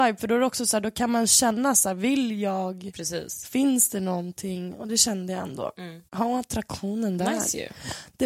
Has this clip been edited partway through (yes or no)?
yes